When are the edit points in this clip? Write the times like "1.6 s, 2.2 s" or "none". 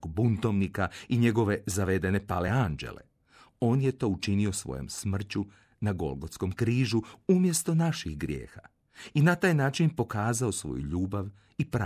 none